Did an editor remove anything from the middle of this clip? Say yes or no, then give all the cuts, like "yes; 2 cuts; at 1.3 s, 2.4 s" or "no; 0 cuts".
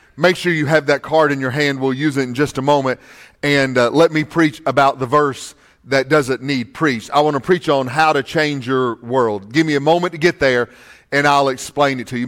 no; 0 cuts